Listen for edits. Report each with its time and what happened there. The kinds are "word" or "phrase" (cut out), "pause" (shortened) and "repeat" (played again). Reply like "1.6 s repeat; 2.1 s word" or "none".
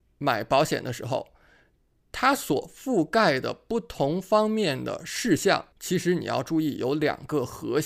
5.7 s pause